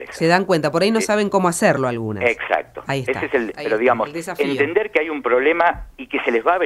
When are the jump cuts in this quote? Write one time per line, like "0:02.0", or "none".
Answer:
0:03.5